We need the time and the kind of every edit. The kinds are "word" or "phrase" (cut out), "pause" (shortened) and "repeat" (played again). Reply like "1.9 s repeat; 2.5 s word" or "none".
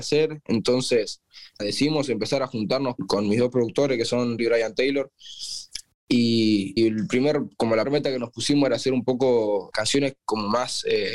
1.6 s word; 3.0 s word; 4.4 s word; 6.8 s word; 7.8 s word; 9.7 s word